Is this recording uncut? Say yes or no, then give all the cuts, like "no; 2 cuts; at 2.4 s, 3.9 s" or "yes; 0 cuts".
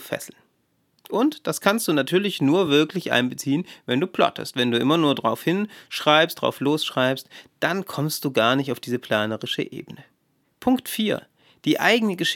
yes; 0 cuts